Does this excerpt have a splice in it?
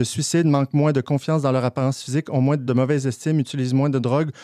yes; 1 cut; at 2.7 s

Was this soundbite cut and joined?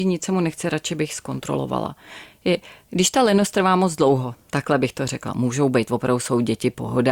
no; 0 cuts

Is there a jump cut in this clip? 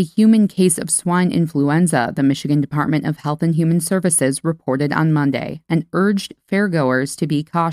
no; 0 cuts

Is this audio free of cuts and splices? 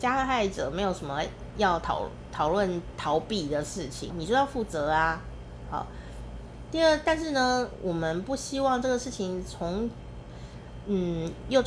no; 1 cut; at 4.1 s

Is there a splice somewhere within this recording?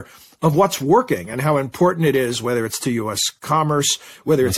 no; 0 cuts

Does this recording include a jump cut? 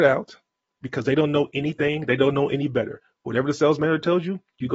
no; 0 cuts

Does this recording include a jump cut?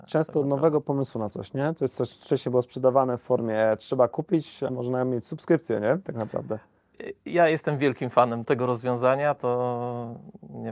yes; 2 cuts; at 4.7 s, 8.4 s

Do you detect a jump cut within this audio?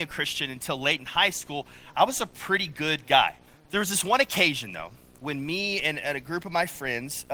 yes; 1 cut; at 3.5 s

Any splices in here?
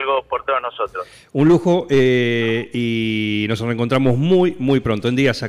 no; 0 cuts

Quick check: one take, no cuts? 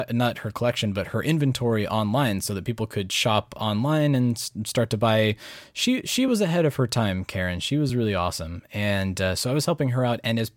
yes; 0 cuts

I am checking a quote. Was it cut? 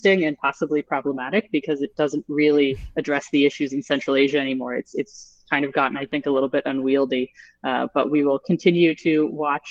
no; 0 cuts

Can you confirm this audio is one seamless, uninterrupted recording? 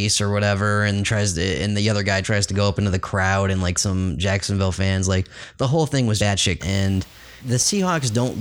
no; 4 cuts; at 3.8 s, 6.2 s, 6.6 s, 7.4 s

